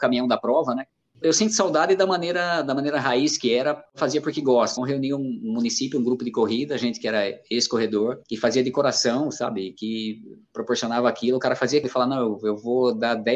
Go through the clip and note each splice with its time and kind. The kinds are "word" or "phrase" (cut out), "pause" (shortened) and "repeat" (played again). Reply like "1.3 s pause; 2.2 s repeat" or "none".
1.2 s word; 4.8 s word; 8.2 s pause; 11.8 s word